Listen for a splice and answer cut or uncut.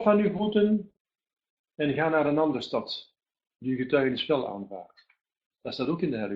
uncut